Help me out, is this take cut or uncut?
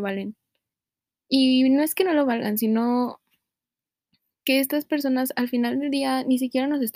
uncut